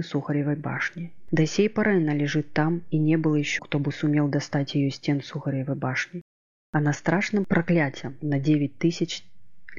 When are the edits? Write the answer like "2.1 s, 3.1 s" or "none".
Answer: 3.6 s, 6.9 s